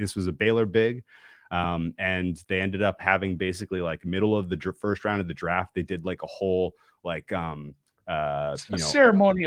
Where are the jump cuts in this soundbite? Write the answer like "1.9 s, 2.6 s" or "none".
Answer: none